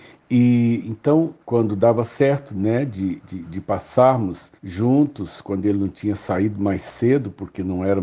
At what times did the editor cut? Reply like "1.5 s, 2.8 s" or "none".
1.4 s, 4.6 s